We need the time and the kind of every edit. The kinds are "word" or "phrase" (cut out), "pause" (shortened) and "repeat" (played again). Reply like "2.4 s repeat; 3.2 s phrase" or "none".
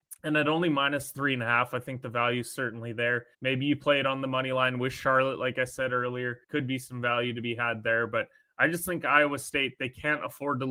3.3 s pause; 6.4 s pause